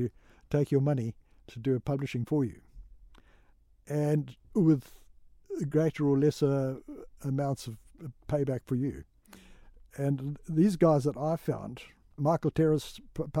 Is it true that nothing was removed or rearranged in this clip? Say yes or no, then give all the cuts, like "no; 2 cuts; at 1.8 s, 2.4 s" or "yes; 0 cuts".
yes; 0 cuts